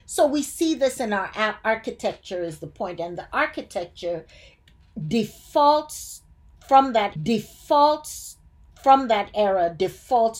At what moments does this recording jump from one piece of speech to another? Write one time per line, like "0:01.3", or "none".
0:07.2